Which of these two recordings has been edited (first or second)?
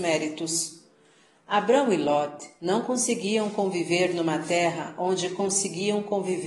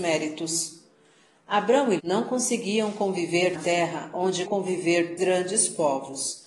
second